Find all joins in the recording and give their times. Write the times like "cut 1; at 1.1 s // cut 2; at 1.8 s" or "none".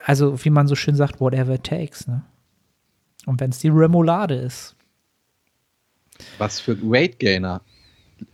none